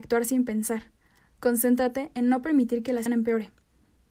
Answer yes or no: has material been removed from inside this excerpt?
yes